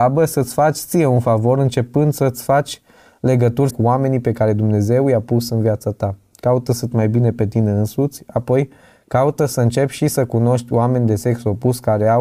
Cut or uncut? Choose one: cut